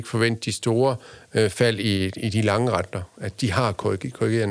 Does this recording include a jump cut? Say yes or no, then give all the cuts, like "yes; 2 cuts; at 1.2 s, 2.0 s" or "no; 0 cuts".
no; 0 cuts